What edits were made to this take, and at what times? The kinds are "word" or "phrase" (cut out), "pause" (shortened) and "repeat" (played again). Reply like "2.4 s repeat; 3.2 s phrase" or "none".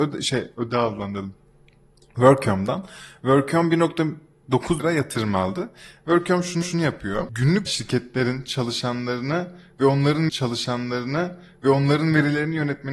4.8 s word; 6.6 s repeat; 7.7 s phrase; 10.3 s repeat